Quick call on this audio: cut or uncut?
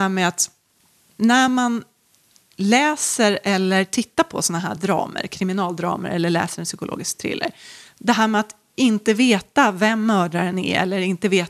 uncut